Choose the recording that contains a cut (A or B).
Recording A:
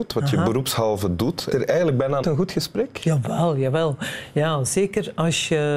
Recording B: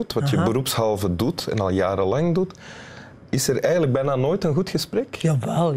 A